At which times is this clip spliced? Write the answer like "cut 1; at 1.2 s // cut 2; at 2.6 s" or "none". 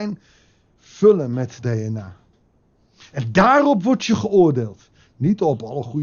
cut 1; at 1.6 s